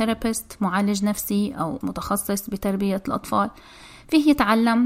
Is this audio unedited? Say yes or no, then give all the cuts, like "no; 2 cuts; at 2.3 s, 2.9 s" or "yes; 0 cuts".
no; 1 cut; at 1.8 s